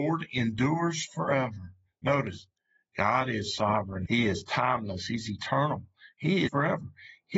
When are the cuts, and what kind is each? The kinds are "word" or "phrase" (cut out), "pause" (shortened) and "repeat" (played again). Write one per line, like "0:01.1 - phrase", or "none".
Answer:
0:06.5 - word